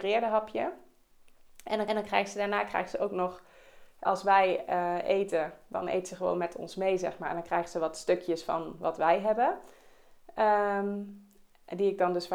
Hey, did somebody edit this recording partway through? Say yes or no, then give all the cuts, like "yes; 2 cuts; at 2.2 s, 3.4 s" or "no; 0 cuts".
yes; 2 cuts; at 1.9 s, 4.1 s